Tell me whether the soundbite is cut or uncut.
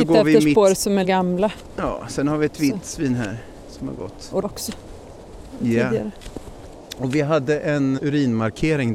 cut